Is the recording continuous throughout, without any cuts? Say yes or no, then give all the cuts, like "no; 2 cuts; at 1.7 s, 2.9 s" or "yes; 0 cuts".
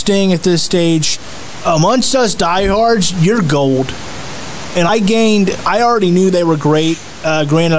no; 1 cut; at 4.9 s